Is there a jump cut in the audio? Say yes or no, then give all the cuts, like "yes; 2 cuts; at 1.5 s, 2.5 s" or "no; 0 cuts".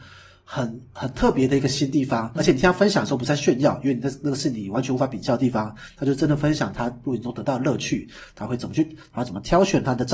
yes; 1 cut; at 2.4 s